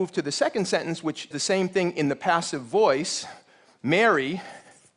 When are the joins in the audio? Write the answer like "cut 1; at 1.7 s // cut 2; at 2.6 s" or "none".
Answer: cut 1; at 1.3 s